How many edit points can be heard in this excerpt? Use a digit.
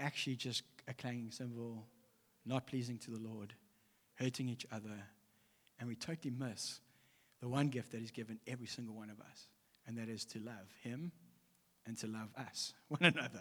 0